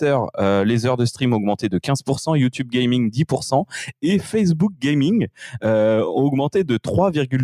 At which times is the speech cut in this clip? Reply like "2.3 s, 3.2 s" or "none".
none